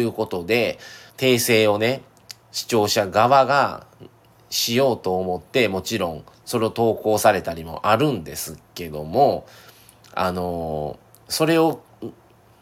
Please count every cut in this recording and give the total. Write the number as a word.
three